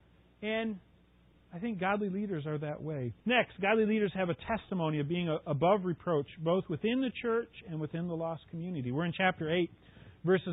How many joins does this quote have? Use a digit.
1